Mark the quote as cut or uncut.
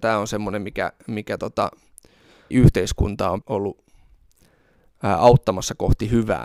cut